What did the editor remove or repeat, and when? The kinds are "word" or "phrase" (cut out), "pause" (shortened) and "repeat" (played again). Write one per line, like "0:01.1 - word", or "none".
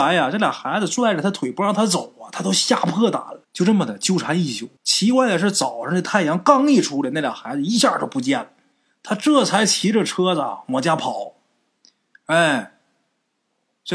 0:03.4 - pause
0:04.8 - pause